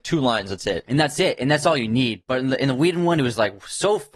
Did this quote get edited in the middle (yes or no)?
no